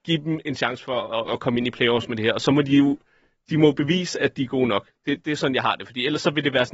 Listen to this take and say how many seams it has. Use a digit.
0